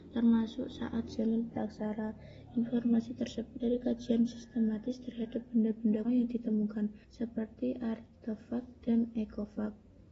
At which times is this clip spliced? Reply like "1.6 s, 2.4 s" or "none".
3.6 s, 6.0 s, 7.0 s